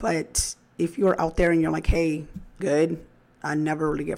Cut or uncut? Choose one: cut